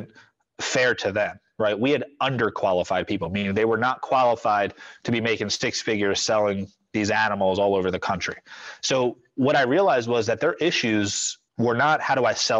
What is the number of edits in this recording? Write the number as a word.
one